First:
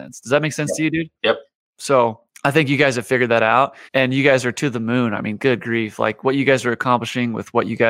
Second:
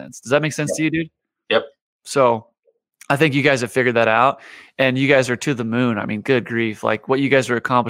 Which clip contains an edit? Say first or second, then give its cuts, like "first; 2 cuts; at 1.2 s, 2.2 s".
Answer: first; 3 cuts; at 1.2 s, 2.3 s, 3.9 s